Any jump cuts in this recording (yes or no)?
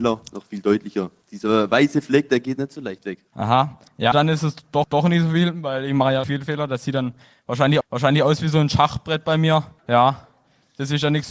yes